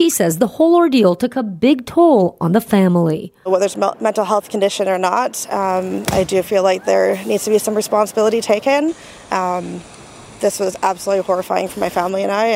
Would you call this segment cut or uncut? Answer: uncut